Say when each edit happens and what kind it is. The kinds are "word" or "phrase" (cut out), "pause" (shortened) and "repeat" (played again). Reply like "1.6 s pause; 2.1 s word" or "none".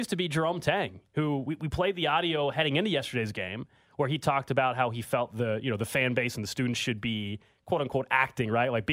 none